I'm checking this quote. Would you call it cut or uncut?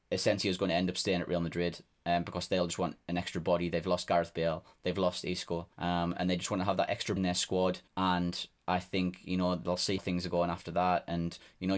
cut